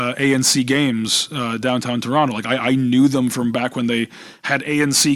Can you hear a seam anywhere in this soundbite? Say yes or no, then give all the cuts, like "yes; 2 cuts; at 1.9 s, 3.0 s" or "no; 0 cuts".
no; 0 cuts